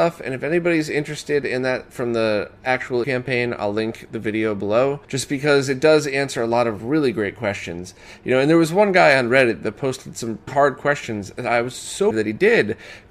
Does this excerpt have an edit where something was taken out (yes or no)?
yes